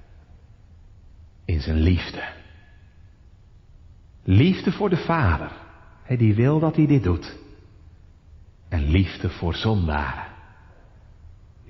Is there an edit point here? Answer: no; 0 cuts

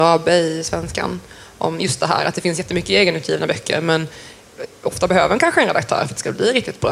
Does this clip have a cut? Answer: no; 0 cuts

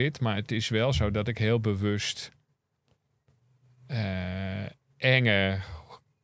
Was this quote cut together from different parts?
no; 0 cuts

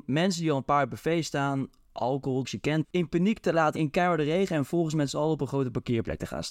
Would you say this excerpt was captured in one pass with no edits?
no; 3 cuts; at 2.4 s, 2.8 s, 3.8 s

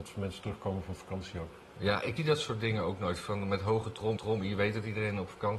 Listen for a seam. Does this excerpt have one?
yes; 3 cuts; at 1.7 s, 2.2 s, 4.2 s

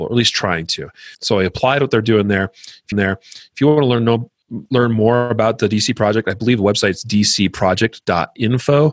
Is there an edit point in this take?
yes; 2 cuts; at 1.1 s, 2.9 s

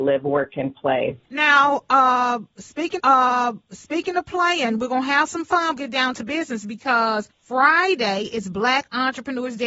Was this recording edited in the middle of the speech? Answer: yes; 4 cuts; at 1.2 s, 3.0 s, 5.8 s, 7.3 s

